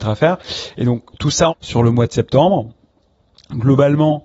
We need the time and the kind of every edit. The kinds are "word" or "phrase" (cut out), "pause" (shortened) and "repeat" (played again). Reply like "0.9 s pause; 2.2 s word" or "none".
1.1 s pause; 1.5 s phrase